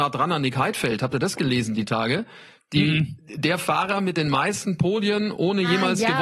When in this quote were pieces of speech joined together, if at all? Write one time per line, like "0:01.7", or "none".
none